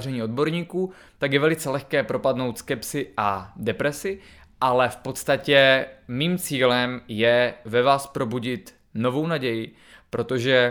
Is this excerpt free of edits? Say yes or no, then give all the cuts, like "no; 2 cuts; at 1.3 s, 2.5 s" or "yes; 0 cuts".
yes; 0 cuts